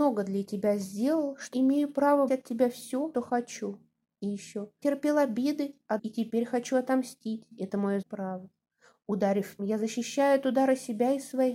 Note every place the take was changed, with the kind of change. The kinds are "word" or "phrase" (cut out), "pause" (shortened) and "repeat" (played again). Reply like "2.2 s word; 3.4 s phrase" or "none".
1.5 s word; 2.3 s word; 3.1 s word; 4.8 s word; 6.0 s word; 8.0 s word; 9.6 s word